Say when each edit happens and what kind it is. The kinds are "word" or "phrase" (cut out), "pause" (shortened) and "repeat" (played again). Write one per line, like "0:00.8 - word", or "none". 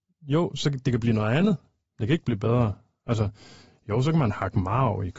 none